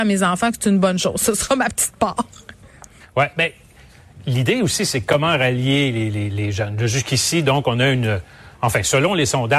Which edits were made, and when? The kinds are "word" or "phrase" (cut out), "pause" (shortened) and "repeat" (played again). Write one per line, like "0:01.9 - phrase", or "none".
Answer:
0:03.0 - pause